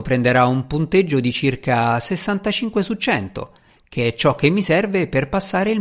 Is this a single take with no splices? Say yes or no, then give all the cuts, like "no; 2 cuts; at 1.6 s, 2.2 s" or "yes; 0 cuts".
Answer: yes; 0 cuts